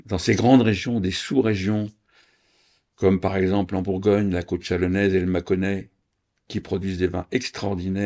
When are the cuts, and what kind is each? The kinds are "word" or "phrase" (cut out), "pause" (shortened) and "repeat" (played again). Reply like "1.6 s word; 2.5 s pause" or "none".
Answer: none